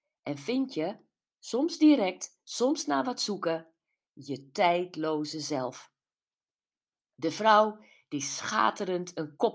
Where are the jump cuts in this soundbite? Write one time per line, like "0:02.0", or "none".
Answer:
none